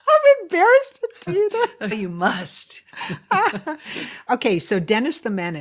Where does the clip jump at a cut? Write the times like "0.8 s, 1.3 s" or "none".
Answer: 1.3 s, 1.9 s, 4.3 s